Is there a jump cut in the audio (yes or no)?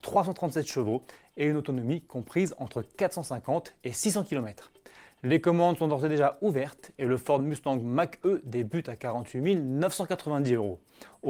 no